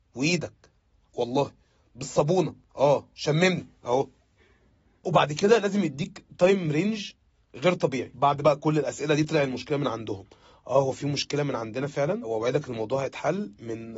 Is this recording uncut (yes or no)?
yes